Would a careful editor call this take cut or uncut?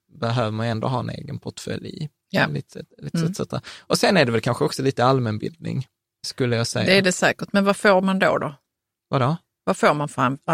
uncut